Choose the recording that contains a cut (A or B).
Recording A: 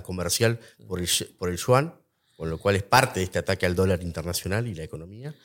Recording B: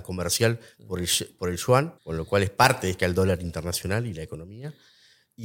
B